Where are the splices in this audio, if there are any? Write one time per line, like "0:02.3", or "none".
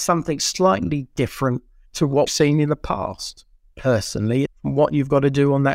0:01.8
0:02.3
0:04.4